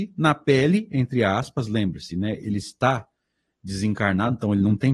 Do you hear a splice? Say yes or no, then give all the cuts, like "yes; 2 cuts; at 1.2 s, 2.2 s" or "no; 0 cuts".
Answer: no; 0 cuts